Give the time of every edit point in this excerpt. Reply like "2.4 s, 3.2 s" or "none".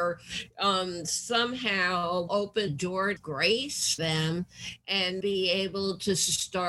2.3 s, 2.7 s, 3.2 s, 4.0 s, 5.2 s